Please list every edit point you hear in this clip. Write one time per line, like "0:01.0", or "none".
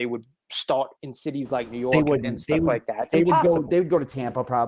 0:01.0

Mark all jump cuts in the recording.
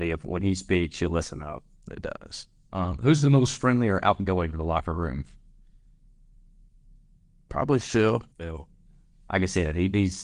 0:04.5
0:08.3

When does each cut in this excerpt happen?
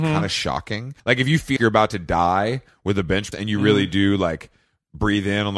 0:01.0
0:01.6
0:03.3

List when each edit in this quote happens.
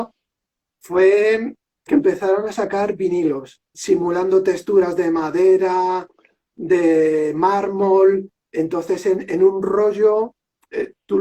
0:01.9
0:03.7

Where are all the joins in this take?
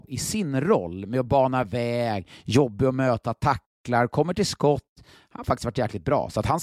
none

